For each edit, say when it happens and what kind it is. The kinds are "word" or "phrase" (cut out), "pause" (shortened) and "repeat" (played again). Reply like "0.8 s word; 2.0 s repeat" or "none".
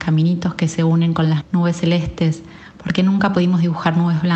1.4 s word